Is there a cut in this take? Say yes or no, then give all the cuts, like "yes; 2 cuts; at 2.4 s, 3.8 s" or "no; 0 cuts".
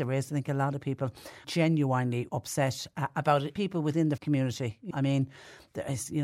yes; 5 cuts; at 1.4 s, 2.3 s, 3.6 s, 4.2 s, 4.9 s